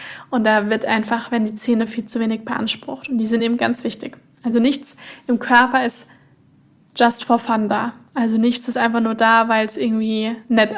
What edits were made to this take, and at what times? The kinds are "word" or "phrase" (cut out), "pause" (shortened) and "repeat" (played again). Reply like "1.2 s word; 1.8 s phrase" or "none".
none

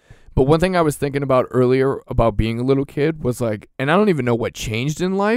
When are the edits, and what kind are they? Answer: 3.7 s pause

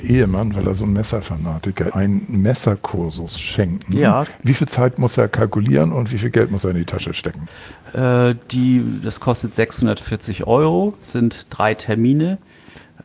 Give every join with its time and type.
1.9 s word

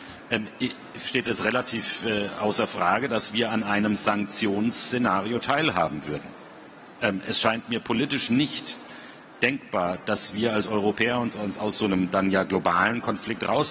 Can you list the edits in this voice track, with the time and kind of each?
1.0 s word

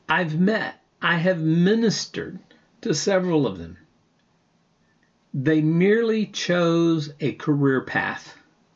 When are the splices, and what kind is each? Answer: 0.9 s pause

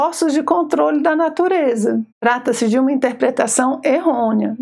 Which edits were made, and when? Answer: 2.1 s pause

